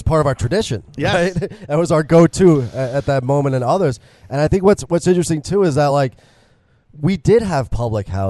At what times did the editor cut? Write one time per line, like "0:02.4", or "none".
none